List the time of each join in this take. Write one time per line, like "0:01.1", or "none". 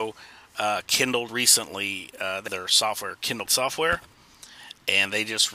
0:01.3
0:02.5
0:03.5